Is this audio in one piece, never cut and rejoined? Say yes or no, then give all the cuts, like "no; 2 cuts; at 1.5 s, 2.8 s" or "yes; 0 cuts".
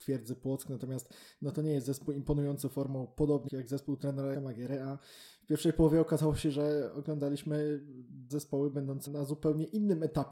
no; 4 cuts; at 3.5 s, 4.3 s, 8.3 s, 9.1 s